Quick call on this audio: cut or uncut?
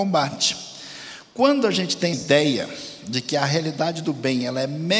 cut